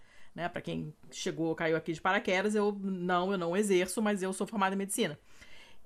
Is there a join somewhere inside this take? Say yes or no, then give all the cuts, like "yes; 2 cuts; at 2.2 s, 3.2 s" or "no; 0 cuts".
no; 0 cuts